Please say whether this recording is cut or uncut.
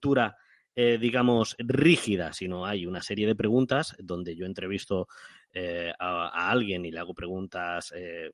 uncut